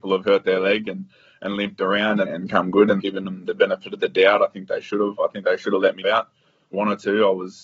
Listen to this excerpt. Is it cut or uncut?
cut